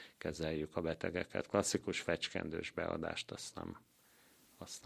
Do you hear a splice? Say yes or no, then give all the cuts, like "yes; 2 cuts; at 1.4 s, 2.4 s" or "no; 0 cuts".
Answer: no; 0 cuts